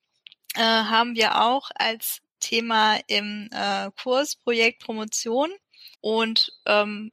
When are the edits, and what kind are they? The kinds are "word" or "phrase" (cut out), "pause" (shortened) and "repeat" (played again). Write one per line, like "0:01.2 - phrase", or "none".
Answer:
0:05.9 - pause